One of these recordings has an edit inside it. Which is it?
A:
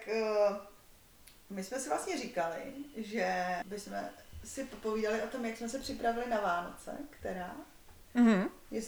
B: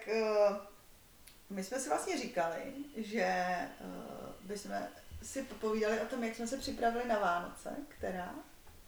A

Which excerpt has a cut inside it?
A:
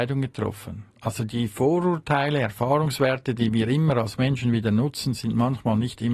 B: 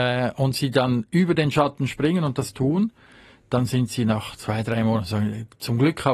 A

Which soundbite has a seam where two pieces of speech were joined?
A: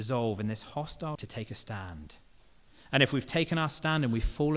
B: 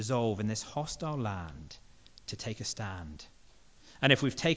A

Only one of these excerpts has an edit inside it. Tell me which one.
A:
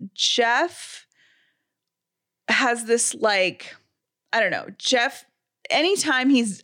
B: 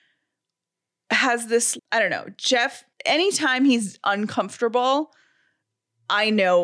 B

